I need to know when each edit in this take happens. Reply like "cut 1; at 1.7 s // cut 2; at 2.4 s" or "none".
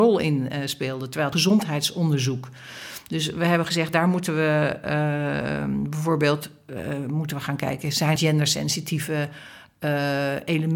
cut 1; at 1.3 s // cut 2; at 8.2 s